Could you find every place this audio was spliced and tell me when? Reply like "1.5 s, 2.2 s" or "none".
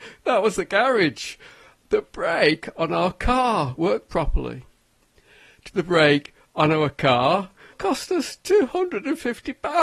3.8 s, 5.7 s, 7.7 s